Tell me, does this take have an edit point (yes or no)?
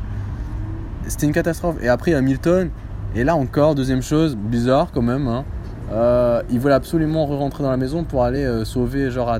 no